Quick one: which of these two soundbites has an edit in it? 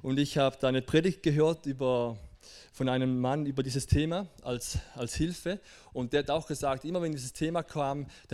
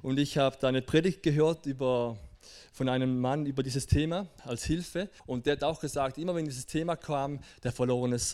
second; 2 cuts; at 4.4 s, 5.2 s

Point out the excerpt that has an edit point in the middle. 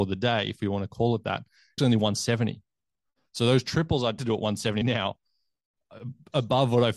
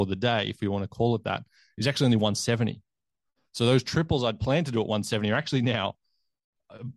first; 3 cuts; at 1.8 s, 4.2 s, 4.8 s

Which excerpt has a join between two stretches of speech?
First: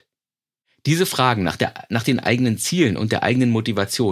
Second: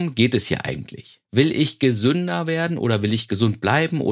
second; 1 cut; at 1.2 s

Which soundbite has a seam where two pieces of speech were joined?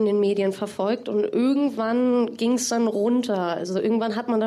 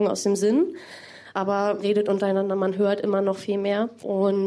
second; 1 cut; at 1.8 s

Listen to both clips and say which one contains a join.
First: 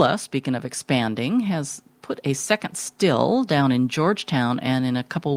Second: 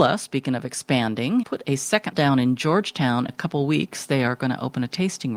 second; 3 cuts; at 1.4 s, 2.1 s, 3.3 s

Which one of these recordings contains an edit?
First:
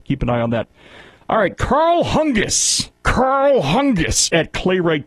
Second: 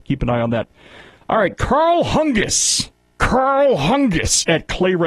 first; 1 cut; at 3.0 s

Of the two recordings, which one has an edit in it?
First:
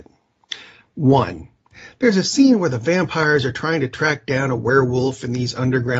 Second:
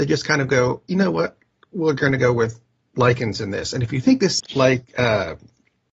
second; 1 cut; at 4.4 s

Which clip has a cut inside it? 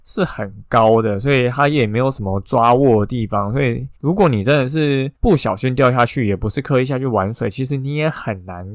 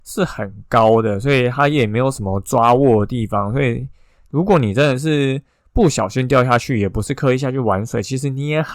first; 2 cuts; at 4.0 s, 5.2 s

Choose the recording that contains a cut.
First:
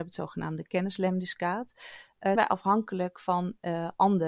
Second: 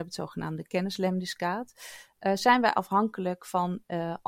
first; 1 cut; at 2.4 s

